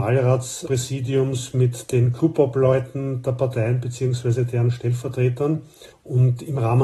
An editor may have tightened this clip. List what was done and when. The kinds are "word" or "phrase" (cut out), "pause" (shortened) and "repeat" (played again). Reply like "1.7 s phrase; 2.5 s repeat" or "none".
none